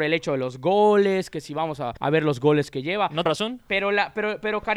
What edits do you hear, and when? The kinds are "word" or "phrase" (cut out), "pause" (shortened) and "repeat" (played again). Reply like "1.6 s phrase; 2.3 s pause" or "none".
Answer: 2.0 s pause; 3.2 s word